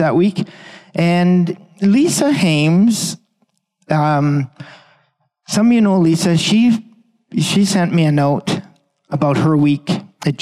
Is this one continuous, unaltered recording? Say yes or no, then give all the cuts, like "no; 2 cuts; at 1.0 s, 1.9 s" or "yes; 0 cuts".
yes; 0 cuts